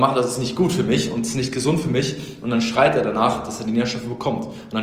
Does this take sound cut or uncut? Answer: uncut